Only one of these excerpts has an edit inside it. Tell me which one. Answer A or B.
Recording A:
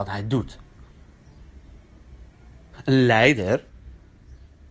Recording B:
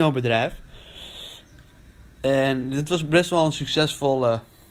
B